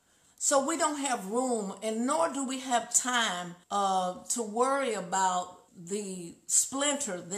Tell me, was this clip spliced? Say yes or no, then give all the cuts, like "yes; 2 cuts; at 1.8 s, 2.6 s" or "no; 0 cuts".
yes; 2 cuts; at 3.6 s, 5.7 s